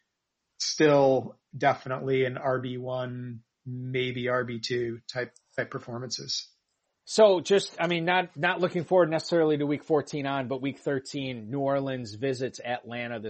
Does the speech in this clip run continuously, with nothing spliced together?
yes; 0 cuts

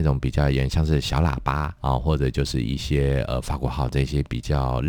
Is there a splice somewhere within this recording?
yes; 1 cut; at 1.8 s

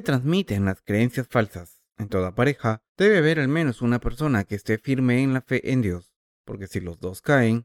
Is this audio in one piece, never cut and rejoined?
no; 3 cuts; at 1.9 s, 2.9 s, 6.2 s

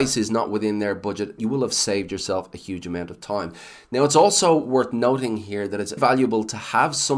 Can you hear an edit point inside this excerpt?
yes; 2 cuts; at 1.4 s, 6.0 s

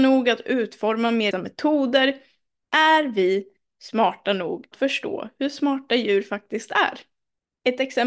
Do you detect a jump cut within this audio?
yes; 2 cuts; at 1.3 s, 4.7 s

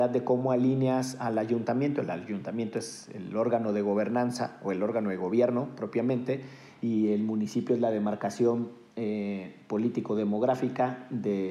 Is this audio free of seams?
yes; 0 cuts

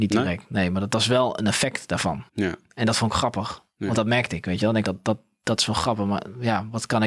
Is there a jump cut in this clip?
yes; 2 cuts; at 2.3 s, 4.8 s

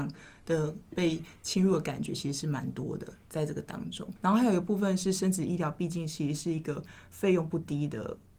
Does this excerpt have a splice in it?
yes; 1 cut; at 4.2 s

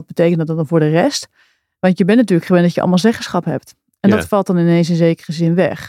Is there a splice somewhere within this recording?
no; 0 cuts

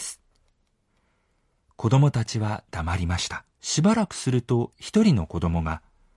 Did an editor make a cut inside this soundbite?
yes; 1 cut; at 3.5 s

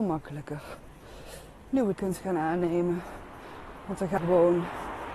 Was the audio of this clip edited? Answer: yes; 2 cuts; at 2.0 s, 4.2 s

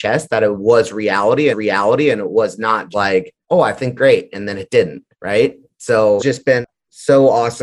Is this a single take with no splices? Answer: no; 6 cuts; at 1.5 s, 2.9 s, 3.4 s, 4.0 s, 5.1 s, 6.2 s

